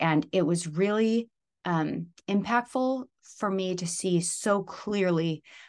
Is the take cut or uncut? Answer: uncut